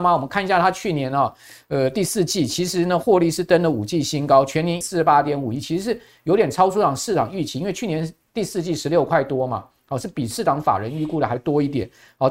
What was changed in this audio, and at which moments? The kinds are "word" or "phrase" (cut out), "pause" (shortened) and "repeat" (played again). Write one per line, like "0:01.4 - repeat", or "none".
0:04.8 - word